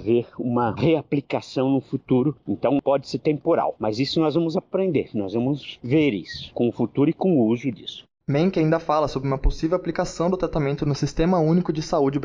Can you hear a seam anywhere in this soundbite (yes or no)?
no